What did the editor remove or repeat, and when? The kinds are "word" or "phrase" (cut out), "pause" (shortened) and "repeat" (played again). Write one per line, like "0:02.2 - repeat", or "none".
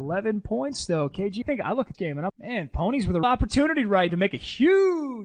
0:01.4 - word
0:01.9 - word
0:02.3 - word
0:03.2 - word
0:04.1 - word